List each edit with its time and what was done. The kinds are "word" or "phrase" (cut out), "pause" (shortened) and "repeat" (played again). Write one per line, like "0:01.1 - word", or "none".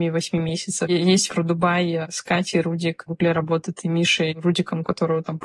0:01.3 - word
0:03.1 - word